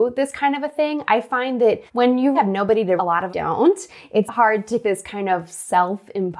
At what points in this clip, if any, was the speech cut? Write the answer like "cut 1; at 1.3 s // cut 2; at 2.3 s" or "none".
cut 1; at 1.9 s // cut 2; at 2.3 s // cut 3; at 3.0 s // cut 4; at 3.3 s // cut 5; at 4.3 s // cut 6; at 4.8 s